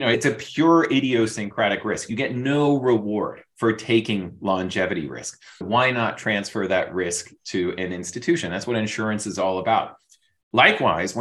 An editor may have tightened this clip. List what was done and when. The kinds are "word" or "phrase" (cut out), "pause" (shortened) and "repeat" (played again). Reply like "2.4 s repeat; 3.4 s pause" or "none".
5.6 s word